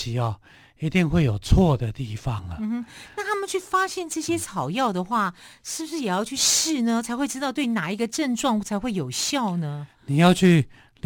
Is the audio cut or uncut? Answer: uncut